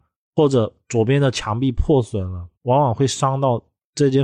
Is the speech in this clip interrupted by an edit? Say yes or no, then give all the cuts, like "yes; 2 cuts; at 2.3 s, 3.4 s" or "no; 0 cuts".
yes; 1 cut; at 2.5 s